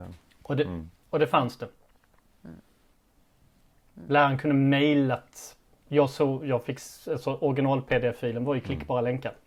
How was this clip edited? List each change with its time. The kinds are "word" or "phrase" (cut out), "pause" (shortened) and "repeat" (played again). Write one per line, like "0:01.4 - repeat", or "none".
none